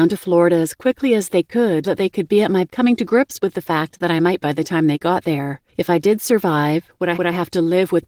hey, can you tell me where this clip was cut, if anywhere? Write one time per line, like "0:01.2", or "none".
0:01.8
0:02.7
0:04.4
0:05.7
0:07.1